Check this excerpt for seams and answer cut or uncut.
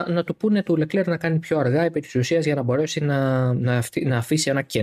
uncut